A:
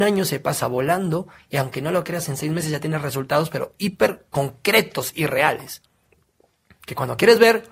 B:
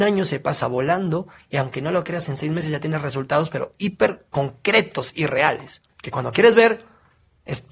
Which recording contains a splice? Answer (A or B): B